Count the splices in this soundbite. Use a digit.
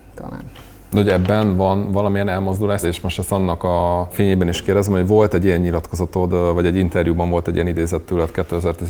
1